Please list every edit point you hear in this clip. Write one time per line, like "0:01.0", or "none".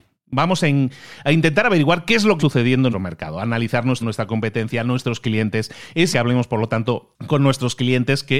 0:02.4
0:02.9
0:04.0
0:06.1